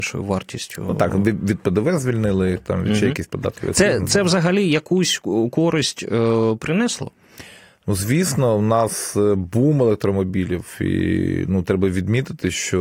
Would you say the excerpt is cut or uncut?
uncut